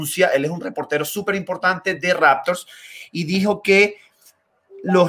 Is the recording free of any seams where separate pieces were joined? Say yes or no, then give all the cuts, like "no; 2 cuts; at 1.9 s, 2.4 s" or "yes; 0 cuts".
yes; 0 cuts